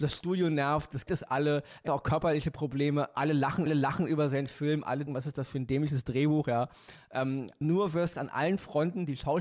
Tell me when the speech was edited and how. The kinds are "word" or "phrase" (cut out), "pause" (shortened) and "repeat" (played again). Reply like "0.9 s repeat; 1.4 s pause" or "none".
1.1 s word; 1.9 s word; 3.7 s repeat; 5.1 s word; 7.6 s word; 8.1 s word